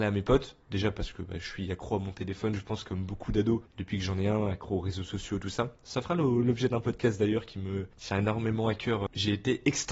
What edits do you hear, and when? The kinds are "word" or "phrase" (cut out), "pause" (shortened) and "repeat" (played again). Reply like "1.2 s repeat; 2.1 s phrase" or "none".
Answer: none